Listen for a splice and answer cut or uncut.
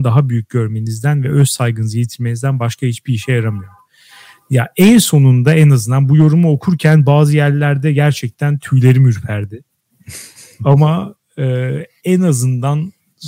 uncut